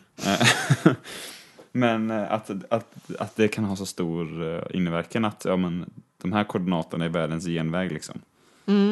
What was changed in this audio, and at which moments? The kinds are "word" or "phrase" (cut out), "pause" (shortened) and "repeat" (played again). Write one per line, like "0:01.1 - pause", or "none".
none

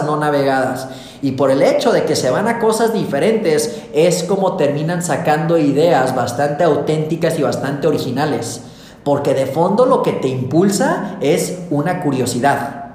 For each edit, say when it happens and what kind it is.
none

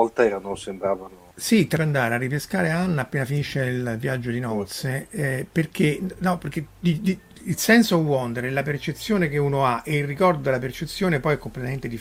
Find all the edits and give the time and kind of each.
0:01.3 - pause
0:01.8 - phrase

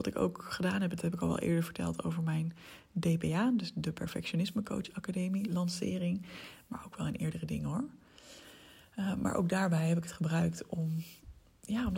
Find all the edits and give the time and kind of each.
none

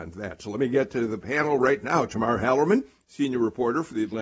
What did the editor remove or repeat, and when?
none

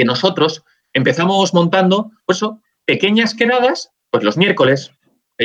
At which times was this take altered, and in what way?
0:02.2 - pause
0:04.0 - pause

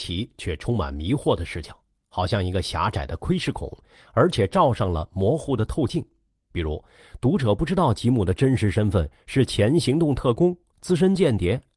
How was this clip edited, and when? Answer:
none

